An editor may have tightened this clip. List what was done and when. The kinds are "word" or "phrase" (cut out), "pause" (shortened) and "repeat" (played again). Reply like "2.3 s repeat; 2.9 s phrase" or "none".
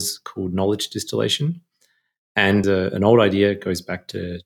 2.6 s phrase